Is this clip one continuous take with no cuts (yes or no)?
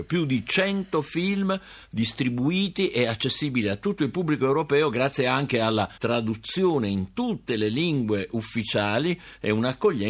no